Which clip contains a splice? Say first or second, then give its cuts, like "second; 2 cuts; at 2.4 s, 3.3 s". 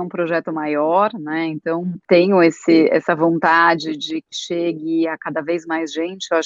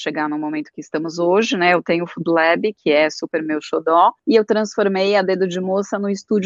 first; 1 cut; at 4.3 s